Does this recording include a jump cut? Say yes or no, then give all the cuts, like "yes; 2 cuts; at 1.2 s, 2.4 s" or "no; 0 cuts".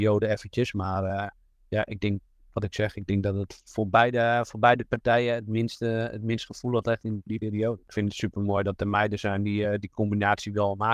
no; 0 cuts